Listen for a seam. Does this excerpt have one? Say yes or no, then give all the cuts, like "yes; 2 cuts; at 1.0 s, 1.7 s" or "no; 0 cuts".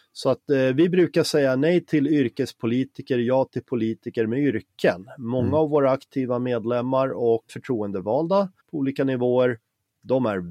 yes; 2 cuts; at 7.5 s, 8.6 s